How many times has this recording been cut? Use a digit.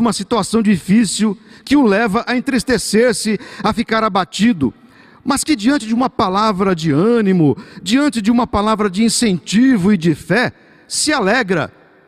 0